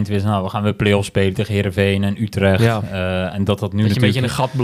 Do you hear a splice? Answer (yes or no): no